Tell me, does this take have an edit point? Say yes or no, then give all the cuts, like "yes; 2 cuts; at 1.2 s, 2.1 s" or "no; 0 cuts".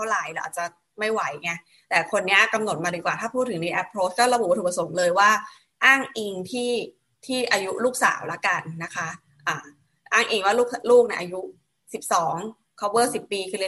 no; 0 cuts